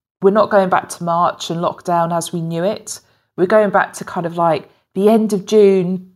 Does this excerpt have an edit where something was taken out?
no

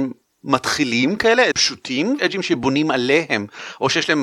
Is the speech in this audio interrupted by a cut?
yes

